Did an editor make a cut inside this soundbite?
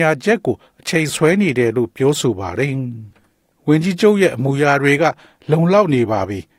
no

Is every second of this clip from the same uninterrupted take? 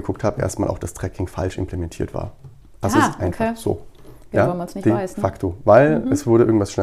yes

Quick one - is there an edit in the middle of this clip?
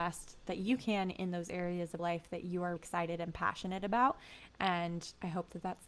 yes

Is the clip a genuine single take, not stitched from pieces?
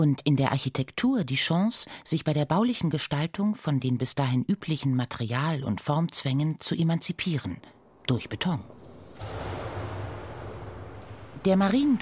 yes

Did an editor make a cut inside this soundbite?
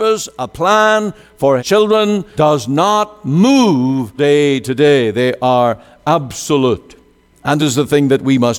yes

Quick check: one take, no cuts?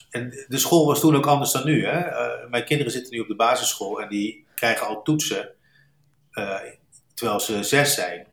yes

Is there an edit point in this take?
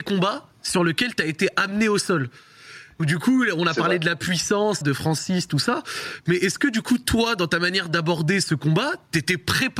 yes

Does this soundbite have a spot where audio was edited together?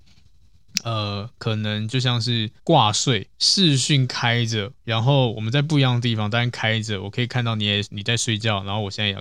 yes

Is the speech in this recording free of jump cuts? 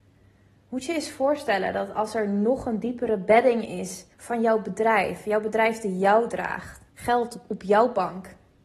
no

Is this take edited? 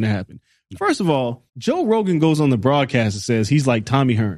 yes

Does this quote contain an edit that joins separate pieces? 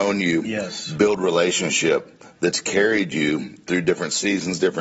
no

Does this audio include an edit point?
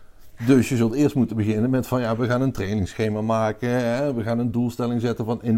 no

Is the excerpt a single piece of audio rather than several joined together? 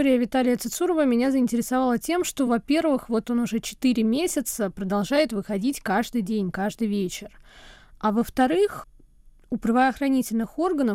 yes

